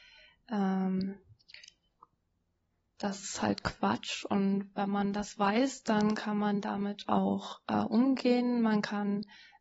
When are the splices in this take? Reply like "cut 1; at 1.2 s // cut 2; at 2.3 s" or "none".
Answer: none